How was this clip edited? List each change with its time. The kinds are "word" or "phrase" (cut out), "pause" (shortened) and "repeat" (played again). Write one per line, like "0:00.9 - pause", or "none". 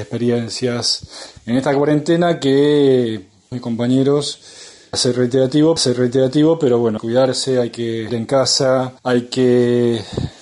0:03.5 - phrase
0:04.9 - word
0:05.8 - repeat
0:07.0 - phrase
0:08.1 - word
0:09.0 - pause